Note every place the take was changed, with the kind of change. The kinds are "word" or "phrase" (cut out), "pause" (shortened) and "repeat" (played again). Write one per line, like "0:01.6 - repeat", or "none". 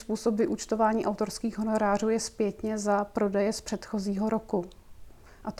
none